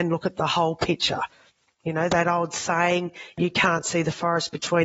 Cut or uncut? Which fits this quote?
uncut